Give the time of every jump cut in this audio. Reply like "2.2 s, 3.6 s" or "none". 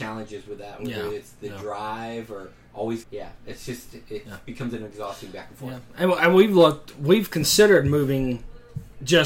3.0 s